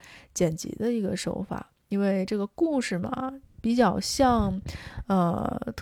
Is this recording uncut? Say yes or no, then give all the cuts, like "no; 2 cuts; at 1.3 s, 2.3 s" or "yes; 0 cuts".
yes; 0 cuts